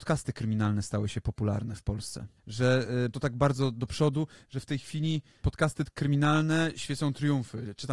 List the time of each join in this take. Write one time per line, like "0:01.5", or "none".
0:02.4
0:03.1
0:05.4